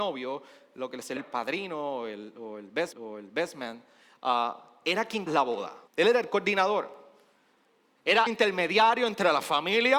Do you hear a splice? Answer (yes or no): yes